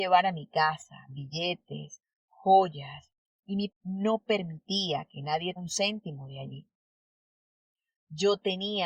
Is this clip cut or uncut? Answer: cut